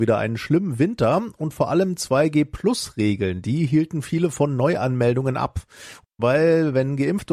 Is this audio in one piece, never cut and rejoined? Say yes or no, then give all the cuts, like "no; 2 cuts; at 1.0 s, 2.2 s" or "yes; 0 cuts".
yes; 0 cuts